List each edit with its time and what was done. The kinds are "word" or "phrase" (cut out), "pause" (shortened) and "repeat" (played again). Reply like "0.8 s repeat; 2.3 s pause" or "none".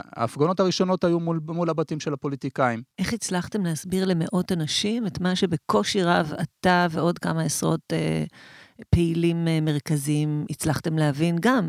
2.9 s pause

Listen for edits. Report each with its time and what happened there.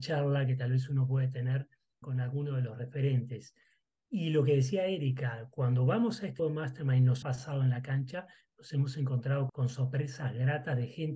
2.0 s word; 6.4 s word; 7.2 s word; 9.5 s word

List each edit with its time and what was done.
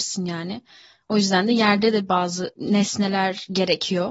none

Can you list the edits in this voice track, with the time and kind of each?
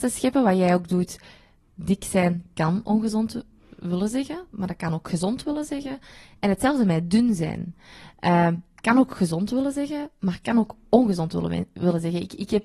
none

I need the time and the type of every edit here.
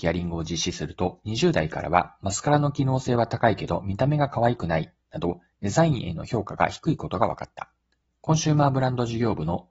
8.0 s pause

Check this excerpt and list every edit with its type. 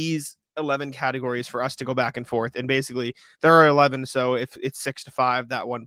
none

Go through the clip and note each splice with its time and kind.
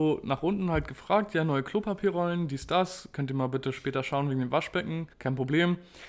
5.1 s pause

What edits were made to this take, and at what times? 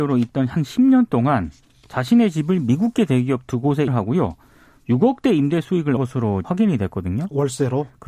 3.9 s word; 6.0 s word; 6.4 s word

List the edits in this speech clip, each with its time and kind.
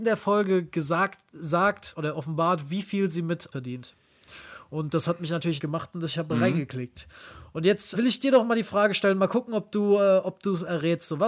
3.5 s word; 5.6 s word; 7.9 s word

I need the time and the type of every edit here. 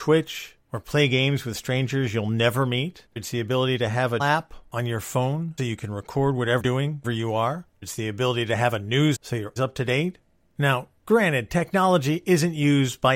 3.2 s word; 4.2 s word; 5.6 s word; 6.6 s word; 7.0 s word; 7.8 s word; 9.1 s word; 9.6 s word

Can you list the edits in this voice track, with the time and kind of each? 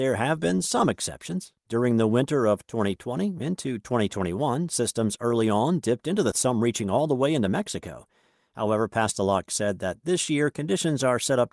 6.3 s phrase

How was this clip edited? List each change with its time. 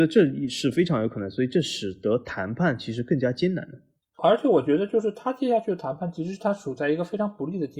none

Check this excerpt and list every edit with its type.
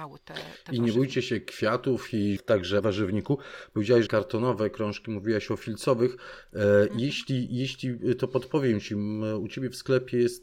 2.4 s word; 2.8 s word; 4.1 s phrase

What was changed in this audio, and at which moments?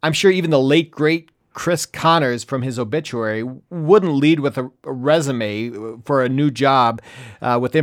4.8 s pause

